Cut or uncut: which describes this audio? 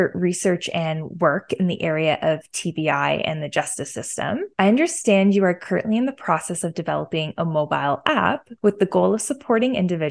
cut